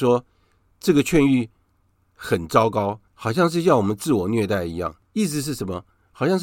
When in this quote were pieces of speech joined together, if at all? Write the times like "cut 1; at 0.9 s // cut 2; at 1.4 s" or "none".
cut 1; at 3.1 s // cut 2; at 5.0 s

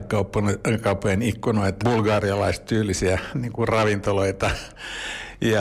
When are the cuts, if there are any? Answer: cut 1; at 1.8 s

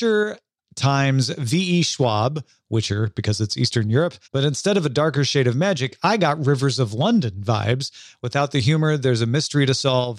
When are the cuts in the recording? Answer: cut 1; at 4.2 s

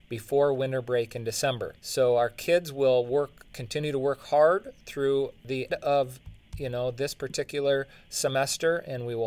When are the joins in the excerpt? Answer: cut 1; at 1.8 s // cut 2; at 5.7 s

